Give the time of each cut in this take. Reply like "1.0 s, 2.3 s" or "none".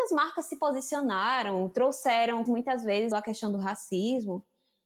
2.5 s, 3.1 s